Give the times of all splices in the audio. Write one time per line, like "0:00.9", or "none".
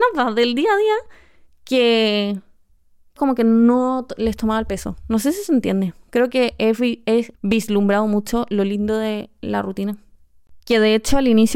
0:03.2
0:07.3